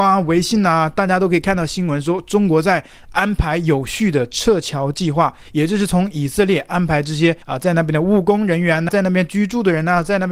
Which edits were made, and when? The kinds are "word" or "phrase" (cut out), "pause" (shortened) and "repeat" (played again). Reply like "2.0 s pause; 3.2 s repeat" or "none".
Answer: 7.4 s pause; 8.9 s word